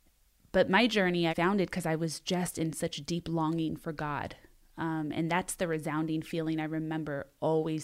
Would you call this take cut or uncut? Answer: cut